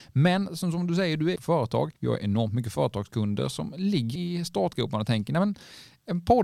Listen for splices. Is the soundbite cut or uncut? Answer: cut